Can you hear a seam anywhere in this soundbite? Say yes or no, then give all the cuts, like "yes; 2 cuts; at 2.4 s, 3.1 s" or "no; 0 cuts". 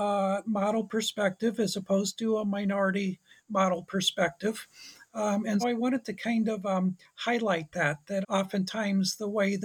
yes; 2 cuts; at 5.6 s, 8.2 s